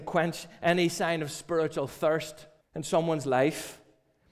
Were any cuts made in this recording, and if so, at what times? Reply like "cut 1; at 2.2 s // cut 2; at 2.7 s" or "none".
cut 1; at 2.6 s